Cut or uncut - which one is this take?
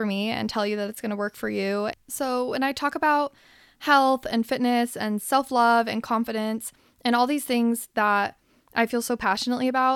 uncut